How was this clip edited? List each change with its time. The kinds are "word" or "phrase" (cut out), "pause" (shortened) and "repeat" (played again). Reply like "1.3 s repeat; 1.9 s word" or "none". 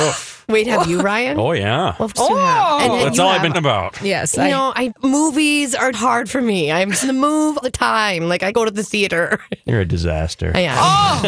2.1 s word; 3.5 s word; 4.9 s word; 5.9 s word; 7.0 s word; 7.6 s word; 8.5 s word